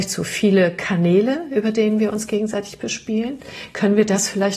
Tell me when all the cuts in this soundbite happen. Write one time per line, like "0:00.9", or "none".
none